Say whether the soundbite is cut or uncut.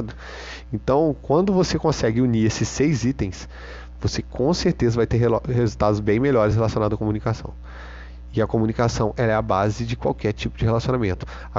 uncut